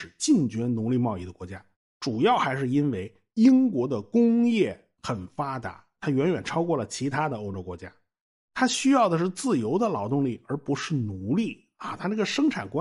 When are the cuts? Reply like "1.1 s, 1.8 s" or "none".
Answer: 1.7 s